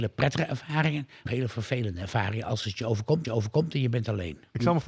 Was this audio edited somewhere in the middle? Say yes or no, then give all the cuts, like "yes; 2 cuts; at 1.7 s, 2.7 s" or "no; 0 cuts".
yes; 2 cuts; at 1.3 s, 3.2 s